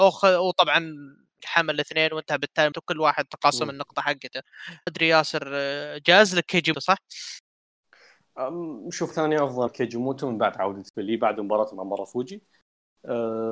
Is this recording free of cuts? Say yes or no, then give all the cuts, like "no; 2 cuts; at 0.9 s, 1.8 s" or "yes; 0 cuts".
no; 7 cuts; at 1.4 s, 2.7 s, 4.9 s, 6.7 s, 9.1 s, 9.7 s, 10.9 s